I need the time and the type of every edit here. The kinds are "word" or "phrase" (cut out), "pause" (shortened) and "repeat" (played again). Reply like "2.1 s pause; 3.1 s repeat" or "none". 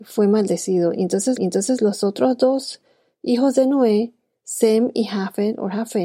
1.4 s repeat